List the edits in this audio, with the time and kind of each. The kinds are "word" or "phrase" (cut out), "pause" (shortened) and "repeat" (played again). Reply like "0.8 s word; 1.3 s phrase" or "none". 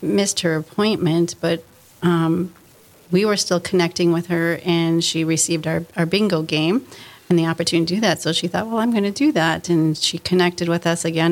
none